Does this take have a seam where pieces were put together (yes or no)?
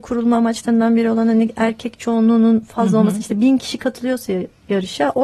no